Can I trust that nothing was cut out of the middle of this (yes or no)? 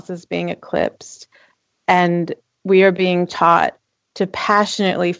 yes